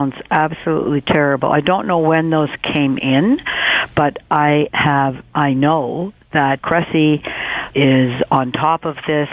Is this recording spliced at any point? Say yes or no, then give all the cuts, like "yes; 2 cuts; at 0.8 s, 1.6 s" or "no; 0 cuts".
yes; 3 cuts; at 4.7 s, 6.6 s, 7.7 s